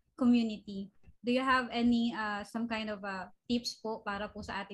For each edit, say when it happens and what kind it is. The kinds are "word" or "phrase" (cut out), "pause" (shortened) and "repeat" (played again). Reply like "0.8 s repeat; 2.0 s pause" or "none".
none